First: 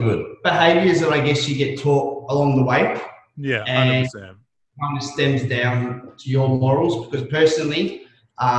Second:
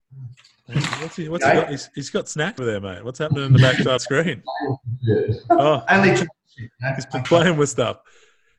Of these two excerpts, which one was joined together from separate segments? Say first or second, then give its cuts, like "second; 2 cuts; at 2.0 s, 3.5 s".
second; 3 cuts; at 2.6 s, 4.0 s, 7.2 s